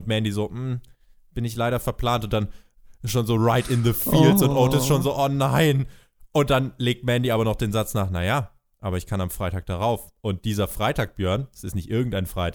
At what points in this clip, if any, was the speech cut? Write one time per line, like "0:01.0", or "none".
none

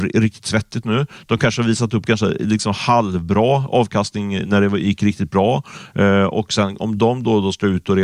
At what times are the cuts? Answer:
none

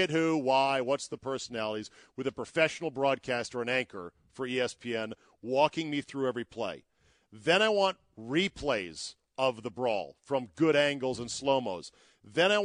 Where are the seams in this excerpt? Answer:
none

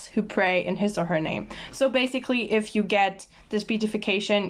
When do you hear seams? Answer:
none

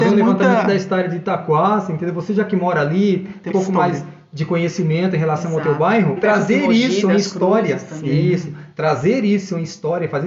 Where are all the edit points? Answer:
0:03.5
0:06.2

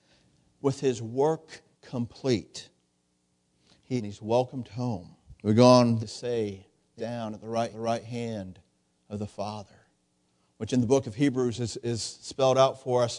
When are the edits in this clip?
0:01.7
0:04.0
0:05.4
0:06.0
0:07.0
0:07.7

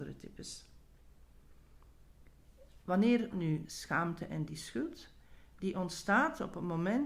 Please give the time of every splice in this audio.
0:03.3
0:03.6

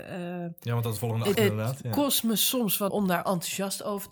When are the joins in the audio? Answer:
0:01.0
0:01.3
0:02.9

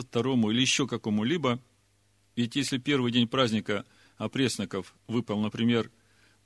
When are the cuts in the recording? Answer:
none

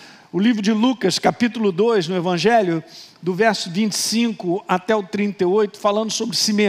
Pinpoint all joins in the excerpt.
none

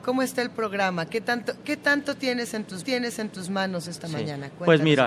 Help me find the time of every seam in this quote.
0:02.8

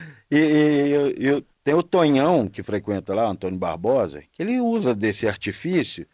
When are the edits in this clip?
0:01.5

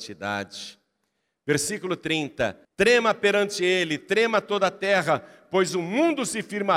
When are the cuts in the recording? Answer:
0:02.6

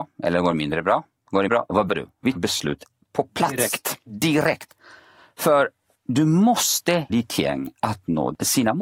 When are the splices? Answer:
0:01.5
0:01.9
0:02.4
0:07.1

